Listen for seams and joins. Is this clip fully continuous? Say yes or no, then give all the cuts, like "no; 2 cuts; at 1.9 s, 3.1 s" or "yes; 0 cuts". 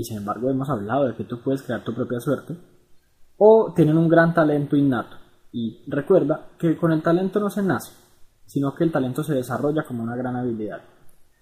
yes; 0 cuts